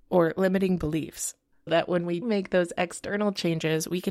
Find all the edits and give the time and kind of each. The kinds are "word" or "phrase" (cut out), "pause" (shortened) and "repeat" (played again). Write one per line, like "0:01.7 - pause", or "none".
0:01.7 - word
0:02.2 - word